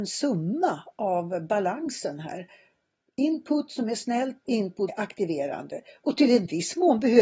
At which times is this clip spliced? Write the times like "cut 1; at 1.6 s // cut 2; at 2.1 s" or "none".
cut 1; at 4.4 s // cut 2; at 4.9 s